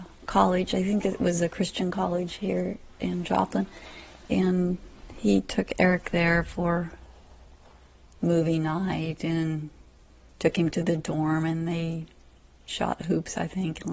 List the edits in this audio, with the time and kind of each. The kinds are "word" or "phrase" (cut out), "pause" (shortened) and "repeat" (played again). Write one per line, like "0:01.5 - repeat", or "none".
none